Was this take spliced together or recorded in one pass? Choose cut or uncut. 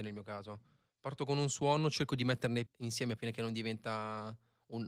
cut